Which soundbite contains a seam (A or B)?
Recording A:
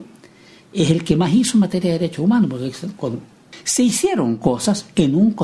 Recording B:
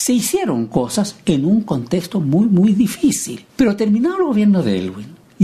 B